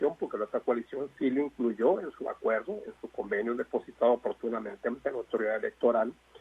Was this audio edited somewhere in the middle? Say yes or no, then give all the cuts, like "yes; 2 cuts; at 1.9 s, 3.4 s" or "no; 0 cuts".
no; 0 cuts